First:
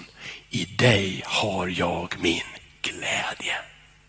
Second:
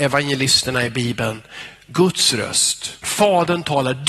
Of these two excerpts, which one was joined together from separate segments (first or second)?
second